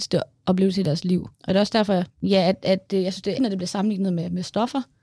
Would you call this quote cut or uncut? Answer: cut